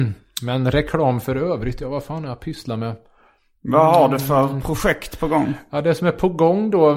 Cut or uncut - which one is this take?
uncut